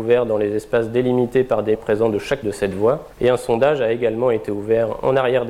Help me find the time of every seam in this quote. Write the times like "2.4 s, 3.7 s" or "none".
1.7 s, 2.4 s, 3.1 s